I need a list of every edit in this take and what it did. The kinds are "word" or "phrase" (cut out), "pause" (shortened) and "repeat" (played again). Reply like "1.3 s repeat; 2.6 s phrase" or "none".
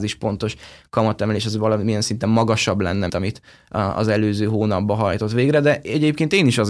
3.1 s word